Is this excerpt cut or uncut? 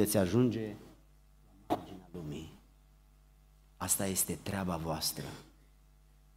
uncut